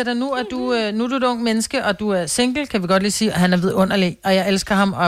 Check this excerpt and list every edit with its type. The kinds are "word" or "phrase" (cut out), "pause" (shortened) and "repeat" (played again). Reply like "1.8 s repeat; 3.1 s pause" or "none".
none